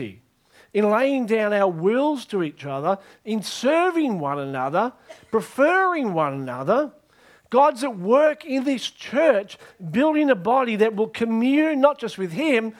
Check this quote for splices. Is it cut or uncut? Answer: uncut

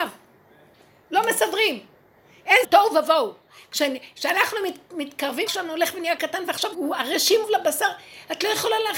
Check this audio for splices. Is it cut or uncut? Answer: cut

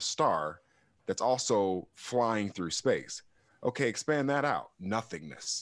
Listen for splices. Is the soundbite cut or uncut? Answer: uncut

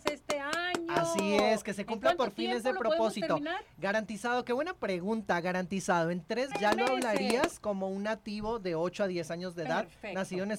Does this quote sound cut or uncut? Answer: cut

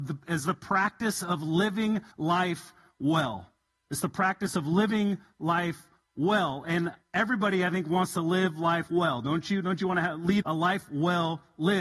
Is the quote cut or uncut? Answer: cut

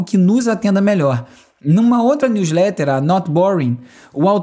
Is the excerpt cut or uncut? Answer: uncut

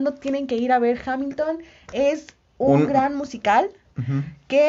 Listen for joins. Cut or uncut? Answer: uncut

